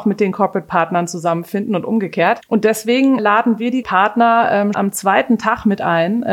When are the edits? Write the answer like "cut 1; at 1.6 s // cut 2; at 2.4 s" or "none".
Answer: cut 1; at 3.2 s // cut 2; at 3.8 s // cut 3; at 4.7 s